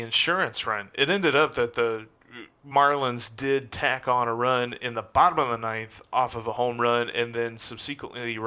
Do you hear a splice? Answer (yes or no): no